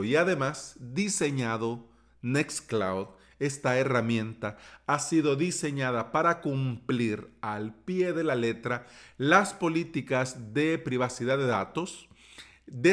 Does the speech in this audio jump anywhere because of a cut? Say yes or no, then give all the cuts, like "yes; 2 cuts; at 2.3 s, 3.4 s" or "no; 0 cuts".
no; 0 cuts